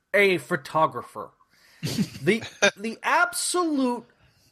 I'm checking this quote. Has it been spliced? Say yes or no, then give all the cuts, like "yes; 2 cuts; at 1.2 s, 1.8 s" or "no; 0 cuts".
no; 0 cuts